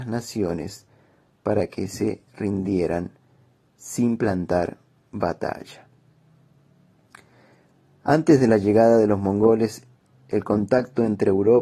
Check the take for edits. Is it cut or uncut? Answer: uncut